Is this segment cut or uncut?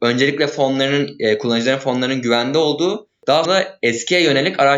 cut